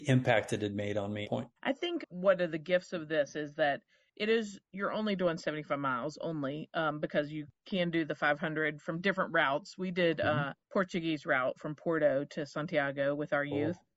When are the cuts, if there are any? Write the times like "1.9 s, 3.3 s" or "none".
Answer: 1.2 s, 1.6 s, 2.0 s, 10.6 s